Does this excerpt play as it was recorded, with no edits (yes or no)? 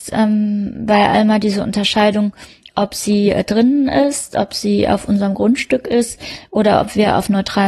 yes